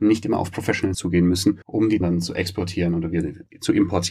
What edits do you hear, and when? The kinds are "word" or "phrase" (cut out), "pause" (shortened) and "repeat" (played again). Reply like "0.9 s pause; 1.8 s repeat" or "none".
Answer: 0.9 s word; 1.6 s pause; 2.0 s word

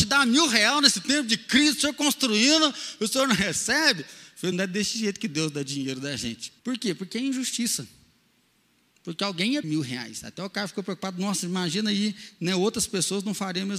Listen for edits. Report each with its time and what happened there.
4.5 s word; 6.6 s pause; 9.6 s word

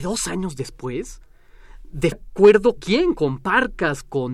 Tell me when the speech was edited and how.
2.1 s word; 2.8 s word

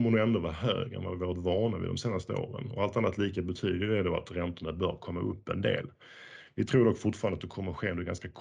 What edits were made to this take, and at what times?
none

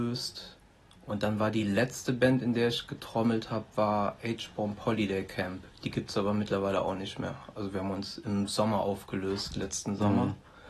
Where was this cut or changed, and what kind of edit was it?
none

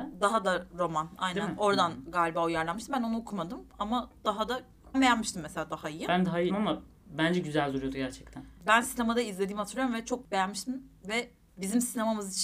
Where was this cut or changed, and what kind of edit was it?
4.9 s word; 6.5 s word

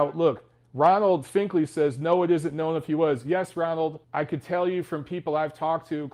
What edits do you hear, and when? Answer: 4.0 s pause

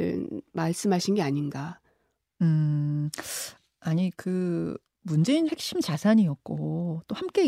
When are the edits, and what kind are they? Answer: 4.1 s word; 5.5 s word

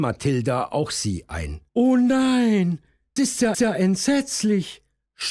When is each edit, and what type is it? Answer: 1.7 s pause; 3.2 s word; 3.5 s repeat

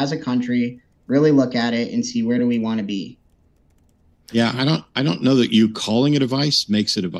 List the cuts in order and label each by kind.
none

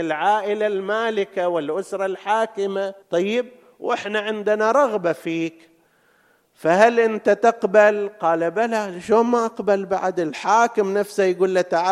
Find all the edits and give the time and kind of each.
3.0 s pause

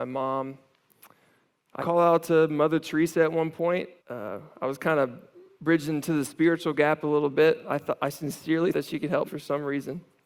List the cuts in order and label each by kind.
1.8 s word; 4.0 s pause; 8.7 s word; 9.3 s word

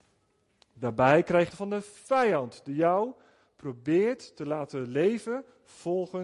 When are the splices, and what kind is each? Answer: 1.5 s phrase

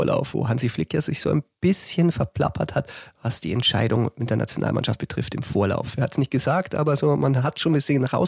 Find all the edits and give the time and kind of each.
none

